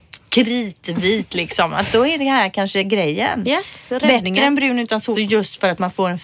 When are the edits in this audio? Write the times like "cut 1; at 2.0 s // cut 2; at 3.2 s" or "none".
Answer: cut 1; at 5.1 s